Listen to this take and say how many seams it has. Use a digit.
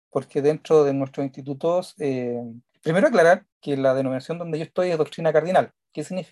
2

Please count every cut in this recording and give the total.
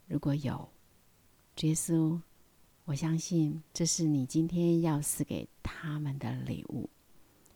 1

